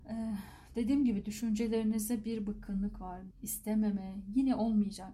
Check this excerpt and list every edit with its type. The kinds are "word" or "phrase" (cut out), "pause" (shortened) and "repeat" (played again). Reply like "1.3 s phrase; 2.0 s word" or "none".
3.3 s word